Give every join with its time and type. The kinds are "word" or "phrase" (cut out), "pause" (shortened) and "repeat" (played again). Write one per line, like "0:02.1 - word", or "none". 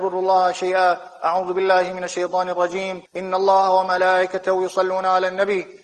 0:03.1 - pause